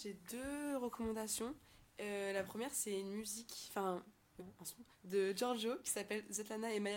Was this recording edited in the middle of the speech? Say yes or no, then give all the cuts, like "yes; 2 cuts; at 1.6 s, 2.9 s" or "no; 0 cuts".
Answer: yes; 1 cut; at 4.4 s